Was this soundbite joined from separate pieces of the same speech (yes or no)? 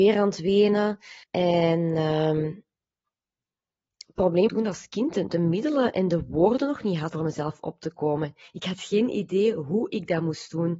yes